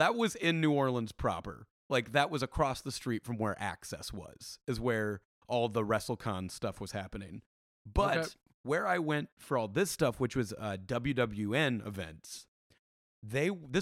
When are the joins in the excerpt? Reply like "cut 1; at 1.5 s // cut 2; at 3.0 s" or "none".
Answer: none